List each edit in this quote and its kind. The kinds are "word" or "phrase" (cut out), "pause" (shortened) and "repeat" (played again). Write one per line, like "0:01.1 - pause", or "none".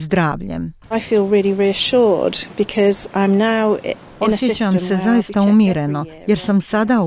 none